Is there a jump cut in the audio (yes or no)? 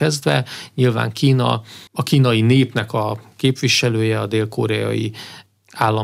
yes